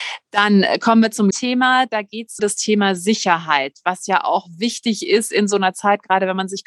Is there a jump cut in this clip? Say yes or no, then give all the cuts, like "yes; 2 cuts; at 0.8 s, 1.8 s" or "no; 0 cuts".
yes; 2 cuts; at 1.3 s, 2.4 s